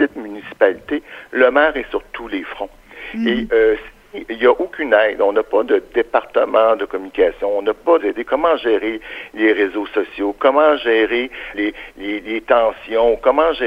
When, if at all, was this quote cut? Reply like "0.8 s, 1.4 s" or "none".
8.0 s, 11.5 s